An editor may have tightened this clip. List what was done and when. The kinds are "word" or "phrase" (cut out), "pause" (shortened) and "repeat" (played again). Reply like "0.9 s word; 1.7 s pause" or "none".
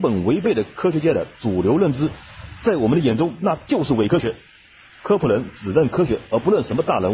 none